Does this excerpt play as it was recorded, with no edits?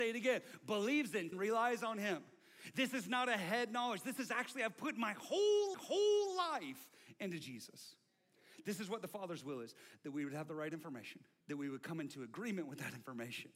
no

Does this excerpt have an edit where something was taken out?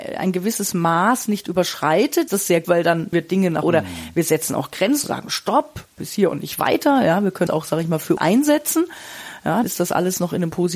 yes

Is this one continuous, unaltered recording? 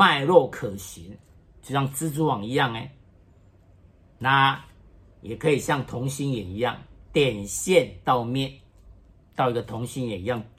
yes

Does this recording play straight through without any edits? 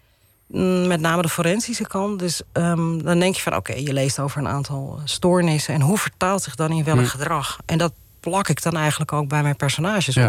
yes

